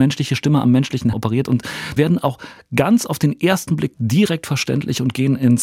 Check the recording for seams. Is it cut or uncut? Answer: cut